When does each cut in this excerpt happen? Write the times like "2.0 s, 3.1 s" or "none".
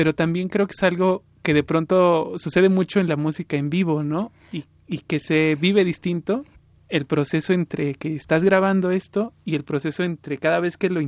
6.5 s